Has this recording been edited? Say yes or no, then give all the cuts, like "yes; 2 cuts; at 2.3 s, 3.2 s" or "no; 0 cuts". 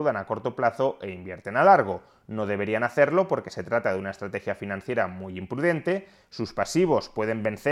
no; 0 cuts